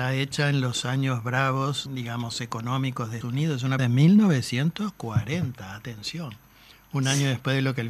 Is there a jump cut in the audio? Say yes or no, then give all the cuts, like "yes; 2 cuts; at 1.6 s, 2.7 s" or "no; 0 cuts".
yes; 3 cuts; at 1.9 s, 3.2 s, 3.8 s